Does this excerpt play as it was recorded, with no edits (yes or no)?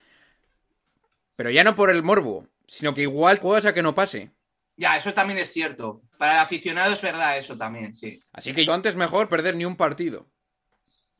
no